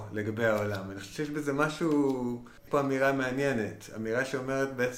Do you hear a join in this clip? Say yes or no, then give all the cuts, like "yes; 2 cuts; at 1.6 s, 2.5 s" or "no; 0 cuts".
yes; 1 cut; at 2.7 s